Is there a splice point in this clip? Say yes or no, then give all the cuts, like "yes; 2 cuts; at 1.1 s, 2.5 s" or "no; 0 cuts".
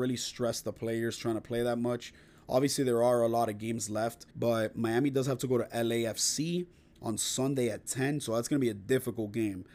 yes; 1 cut; at 4.3 s